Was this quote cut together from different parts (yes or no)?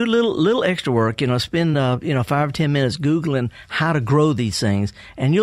no